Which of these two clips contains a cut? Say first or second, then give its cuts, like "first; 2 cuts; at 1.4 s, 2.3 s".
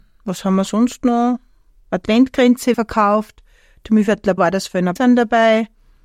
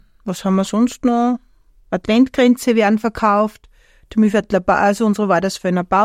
first; 3 cuts; at 2.7 s, 4.4 s, 5.0 s